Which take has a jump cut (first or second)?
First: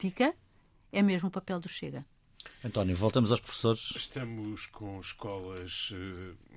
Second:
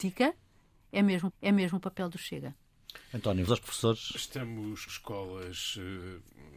second